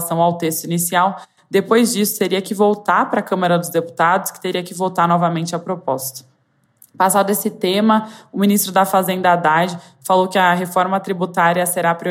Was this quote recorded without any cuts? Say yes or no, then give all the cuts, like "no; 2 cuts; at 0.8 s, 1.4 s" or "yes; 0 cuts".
yes; 0 cuts